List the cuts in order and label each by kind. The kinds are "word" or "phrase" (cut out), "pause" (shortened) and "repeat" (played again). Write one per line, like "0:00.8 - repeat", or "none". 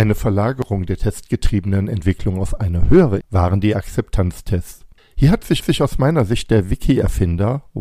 0:03.2 - word
0:05.0 - pause
0:05.6 - repeat